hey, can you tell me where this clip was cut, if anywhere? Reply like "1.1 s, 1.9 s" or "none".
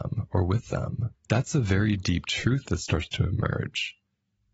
1.2 s

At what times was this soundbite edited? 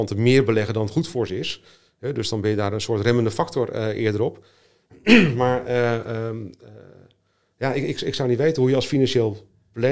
none

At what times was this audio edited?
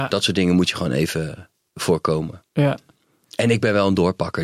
none

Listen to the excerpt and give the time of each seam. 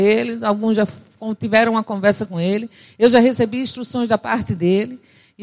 none

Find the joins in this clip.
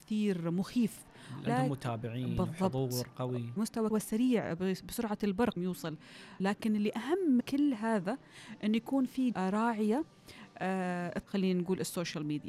1.5 s, 3.6 s, 3.9 s, 5.6 s, 6.4 s, 7.4 s, 9.3 s, 11.2 s

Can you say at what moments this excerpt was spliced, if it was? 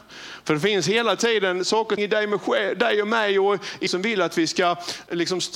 2.0 s, 3.9 s

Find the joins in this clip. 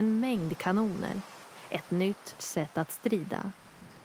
2.4 s

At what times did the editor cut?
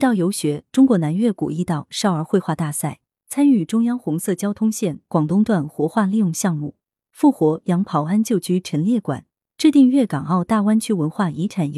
none

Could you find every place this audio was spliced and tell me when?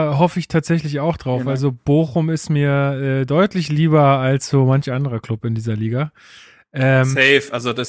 none

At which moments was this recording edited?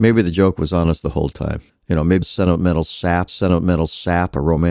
1.7 s, 2.2 s, 3.3 s

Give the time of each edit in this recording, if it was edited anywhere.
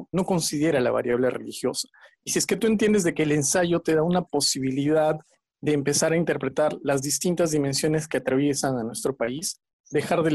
none

